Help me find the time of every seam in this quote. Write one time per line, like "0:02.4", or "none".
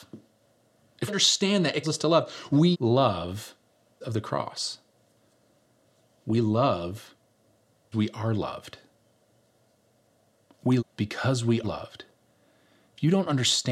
0:01.1
0:01.8
0:02.7
0:04.0
0:07.9
0:10.8
0:11.6